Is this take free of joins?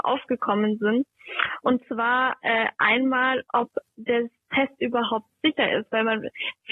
yes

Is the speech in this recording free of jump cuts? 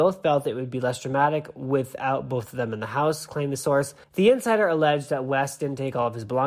no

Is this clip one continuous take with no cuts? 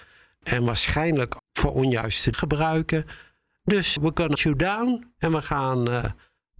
no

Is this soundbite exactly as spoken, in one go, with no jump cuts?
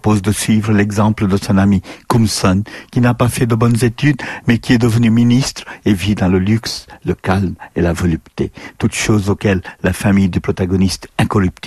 yes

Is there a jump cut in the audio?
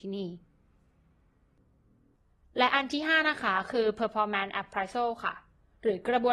no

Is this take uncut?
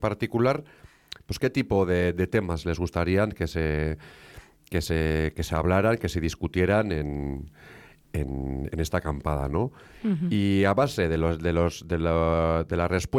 yes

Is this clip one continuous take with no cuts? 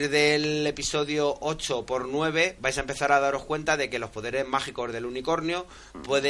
yes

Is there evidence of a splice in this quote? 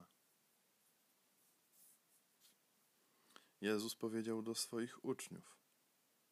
no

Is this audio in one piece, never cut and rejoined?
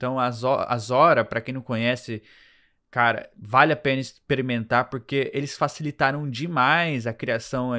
yes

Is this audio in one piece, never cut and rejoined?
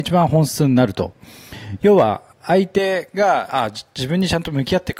no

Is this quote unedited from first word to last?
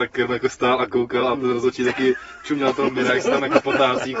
yes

